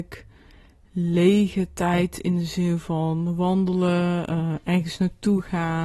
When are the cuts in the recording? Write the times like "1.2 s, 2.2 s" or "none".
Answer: none